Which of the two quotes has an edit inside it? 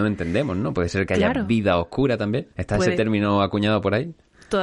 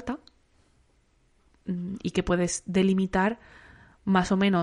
first; 1 cut; at 2.5 s

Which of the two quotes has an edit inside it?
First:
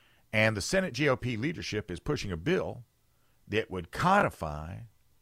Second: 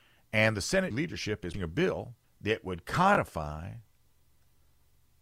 second; 3 cuts; at 0.9 s, 1.5 s, 2.2 s

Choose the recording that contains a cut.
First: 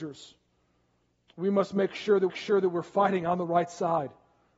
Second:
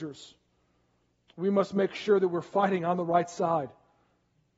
first; 1 cut; at 2.3 s

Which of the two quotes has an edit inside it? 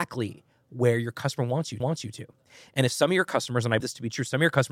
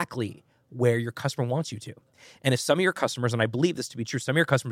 first; 2 cuts; at 1.8 s, 3.8 s

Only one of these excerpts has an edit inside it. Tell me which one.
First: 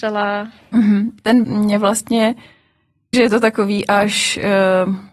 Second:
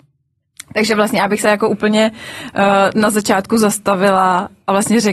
first; 2 cuts; at 1.4 s, 3.1 s

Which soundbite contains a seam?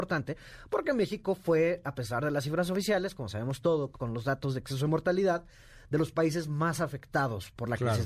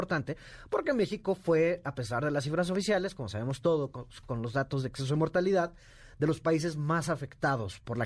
first; 1 cut; at 3.9 s

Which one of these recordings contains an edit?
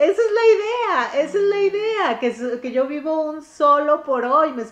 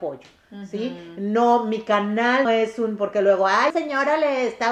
second; 2 cuts; at 2.4 s, 3.7 s

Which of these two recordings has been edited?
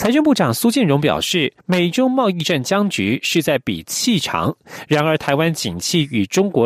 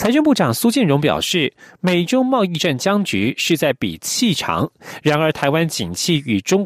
first; 1 cut; at 1.6 s

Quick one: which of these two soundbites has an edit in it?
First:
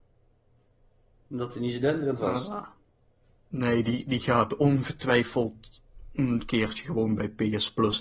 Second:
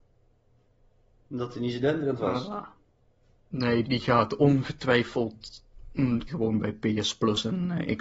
second; 2 cuts; at 3.8 s, 6.3 s

